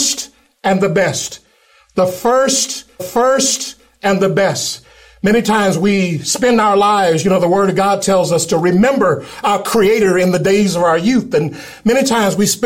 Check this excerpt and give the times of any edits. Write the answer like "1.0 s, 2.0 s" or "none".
3.0 s